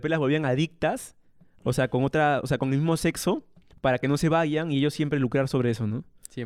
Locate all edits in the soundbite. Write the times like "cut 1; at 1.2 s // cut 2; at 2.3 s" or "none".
none

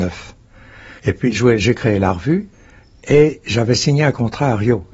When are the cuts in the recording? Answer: cut 1; at 1.0 s // cut 2; at 1.3 s

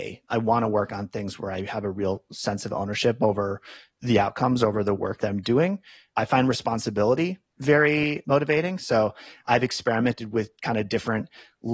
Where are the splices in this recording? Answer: none

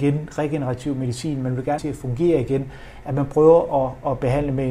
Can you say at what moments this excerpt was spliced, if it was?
cut 1; at 1.8 s

